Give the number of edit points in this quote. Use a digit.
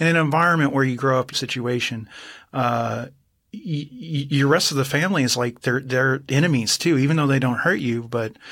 1